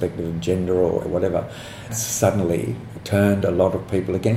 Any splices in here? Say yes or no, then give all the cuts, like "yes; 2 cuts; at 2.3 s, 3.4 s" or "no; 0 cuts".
yes; 2 cuts; at 1.0 s, 1.9 s